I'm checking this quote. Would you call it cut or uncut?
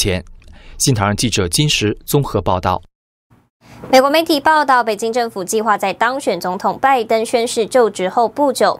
uncut